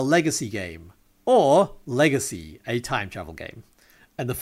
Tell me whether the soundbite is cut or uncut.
uncut